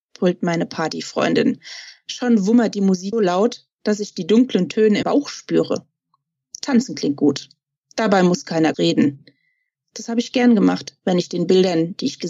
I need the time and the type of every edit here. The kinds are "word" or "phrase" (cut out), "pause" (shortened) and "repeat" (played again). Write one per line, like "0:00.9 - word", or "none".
0:03.1 - word
0:05.0 - word
0:08.7 - word